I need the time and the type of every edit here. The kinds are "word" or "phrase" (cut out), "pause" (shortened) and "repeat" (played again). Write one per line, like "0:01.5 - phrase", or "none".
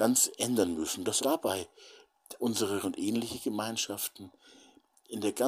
0:01.2 - word
0:02.8 - word

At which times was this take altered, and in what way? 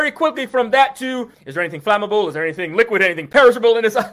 0:01.3 - pause

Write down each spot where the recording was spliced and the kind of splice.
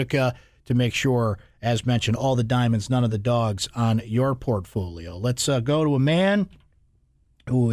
none

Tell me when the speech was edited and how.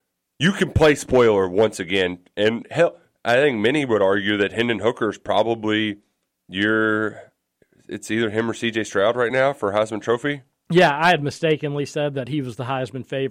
none

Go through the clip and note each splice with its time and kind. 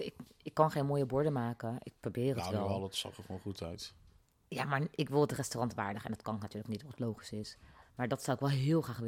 none

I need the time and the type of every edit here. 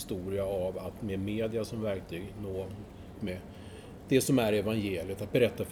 0:03.1 - word

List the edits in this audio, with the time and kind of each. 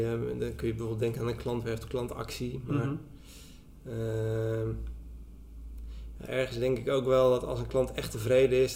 none

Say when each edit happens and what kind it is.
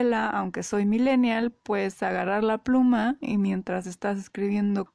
none

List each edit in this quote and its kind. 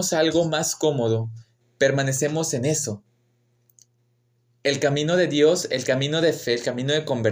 none

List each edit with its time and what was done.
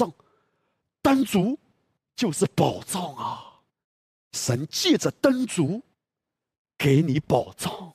0:03.8 - pause

